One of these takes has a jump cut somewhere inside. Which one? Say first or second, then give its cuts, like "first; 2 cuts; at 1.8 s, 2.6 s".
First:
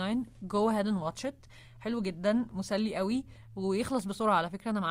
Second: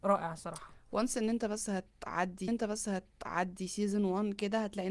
second; 1 cut; at 2.5 s